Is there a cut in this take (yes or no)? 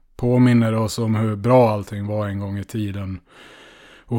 no